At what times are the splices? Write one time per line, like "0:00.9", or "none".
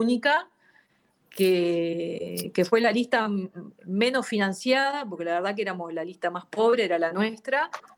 none